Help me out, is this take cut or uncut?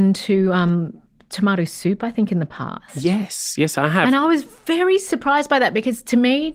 uncut